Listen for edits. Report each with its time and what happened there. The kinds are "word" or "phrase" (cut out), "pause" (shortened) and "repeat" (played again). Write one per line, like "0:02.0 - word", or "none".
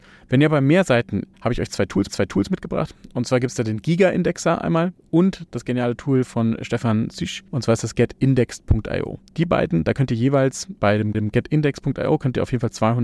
0:01.3 - phrase
0:02.1 - repeat
0:07.5 - pause
0:09.3 - pause
0:10.8 - word
0:11.1 - repeat

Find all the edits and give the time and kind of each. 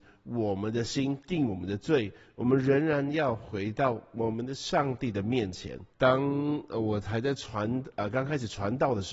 0:05.9 - pause

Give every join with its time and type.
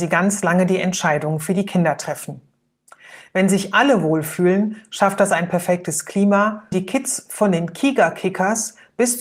0:06.7 - word

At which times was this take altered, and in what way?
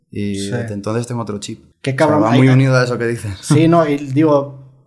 0:01.7 - pause

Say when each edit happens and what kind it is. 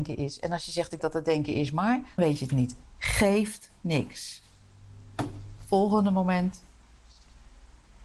0:01.0 - word
0:02.2 - word
0:02.5 - word

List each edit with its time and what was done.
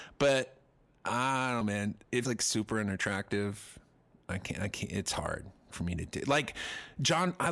0:01.6 - word
0:02.2 - word
0:05.7 - word

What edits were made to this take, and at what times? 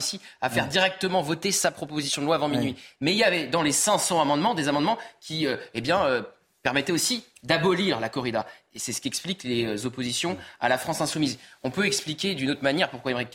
none

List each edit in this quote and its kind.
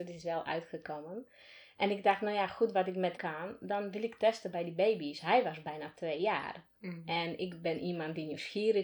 0:03.2 - word

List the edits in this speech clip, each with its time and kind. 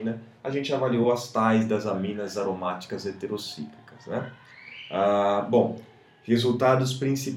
none

